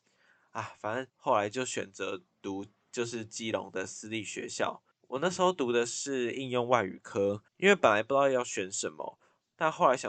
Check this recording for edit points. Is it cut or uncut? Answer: cut